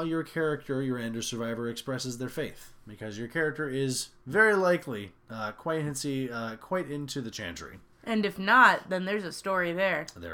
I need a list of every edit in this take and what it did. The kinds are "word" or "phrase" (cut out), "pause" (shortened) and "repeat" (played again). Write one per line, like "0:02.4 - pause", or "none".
0:05.2 - pause
0:07.9 - pause